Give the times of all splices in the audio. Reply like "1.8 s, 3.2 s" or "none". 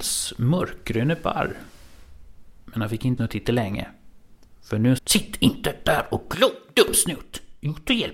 3.2 s, 5.0 s